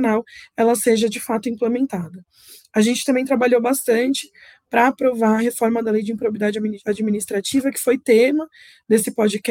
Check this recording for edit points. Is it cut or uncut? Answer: uncut